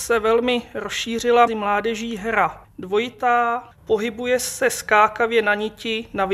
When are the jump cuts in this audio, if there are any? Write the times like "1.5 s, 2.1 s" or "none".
1.5 s, 2.6 s, 3.7 s

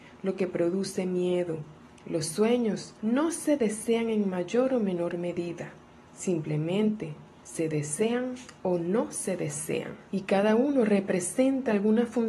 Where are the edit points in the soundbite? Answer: 1.9 s, 3.0 s, 6.0 s, 8.6 s, 10.1 s

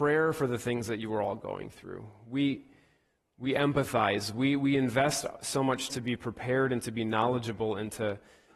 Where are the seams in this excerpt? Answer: 5.9 s

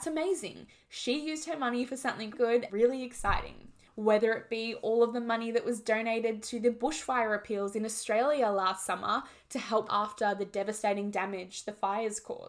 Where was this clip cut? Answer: 2.3 s, 2.7 s, 3.9 s, 9.9 s

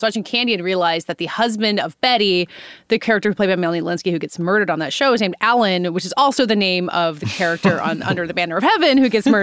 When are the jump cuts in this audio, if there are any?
none

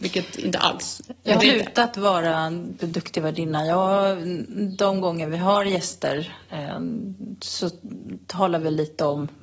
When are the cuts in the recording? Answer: 1.4 s, 2.8 s

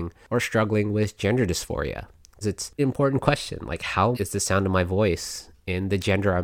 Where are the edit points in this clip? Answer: 2.4 s, 2.8 s, 4.1 s

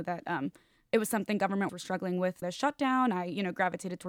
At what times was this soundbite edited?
1.7 s, 2.4 s

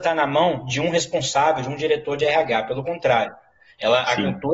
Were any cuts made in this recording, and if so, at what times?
none

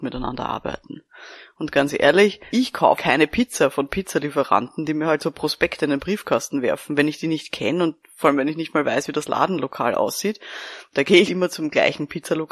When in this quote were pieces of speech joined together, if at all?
2.5 s, 3.0 s, 11.3 s

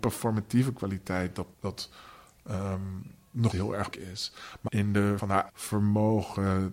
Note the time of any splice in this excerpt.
1.5 s, 3.5 s, 3.9 s, 4.7 s, 5.2 s, 5.5 s

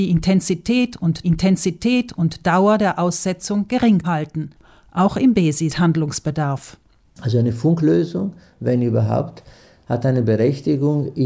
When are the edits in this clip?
1.2 s, 4.0 s, 5.7 s

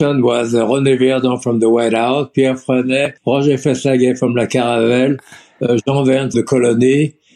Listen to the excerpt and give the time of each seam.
3.2 s, 6.3 s

